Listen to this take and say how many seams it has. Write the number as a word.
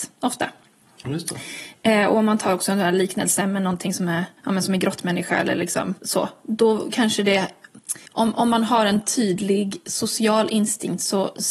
three